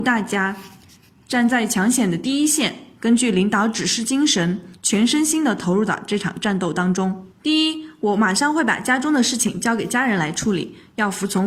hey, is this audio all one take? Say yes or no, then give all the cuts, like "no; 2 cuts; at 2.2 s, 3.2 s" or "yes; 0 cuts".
no; 1 cut; at 7.3 s